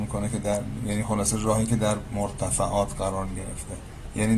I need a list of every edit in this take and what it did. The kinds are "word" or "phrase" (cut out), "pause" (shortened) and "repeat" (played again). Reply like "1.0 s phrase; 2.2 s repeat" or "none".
none